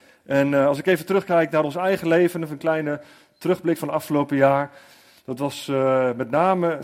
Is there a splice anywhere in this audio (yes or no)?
no